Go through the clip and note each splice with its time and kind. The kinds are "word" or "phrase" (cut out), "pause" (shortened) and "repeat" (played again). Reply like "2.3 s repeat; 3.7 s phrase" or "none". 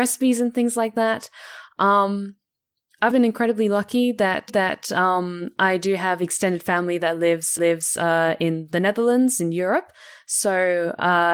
3.1 s word; 4.5 s repeat; 7.6 s repeat